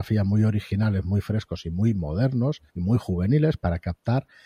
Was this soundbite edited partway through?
yes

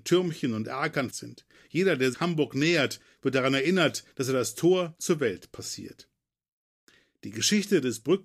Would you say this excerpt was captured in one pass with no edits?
no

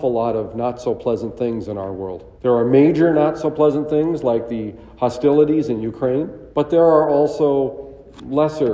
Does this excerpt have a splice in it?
yes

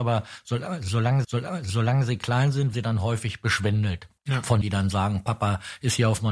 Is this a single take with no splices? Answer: no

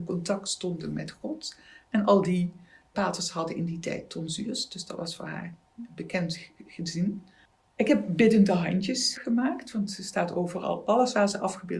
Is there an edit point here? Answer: yes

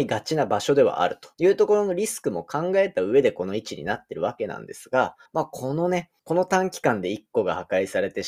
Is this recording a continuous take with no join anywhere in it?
no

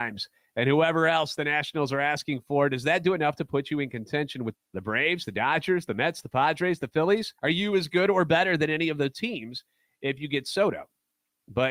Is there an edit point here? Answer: yes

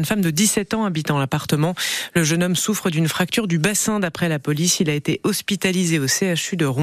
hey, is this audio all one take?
yes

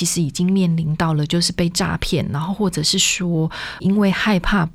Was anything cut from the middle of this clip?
yes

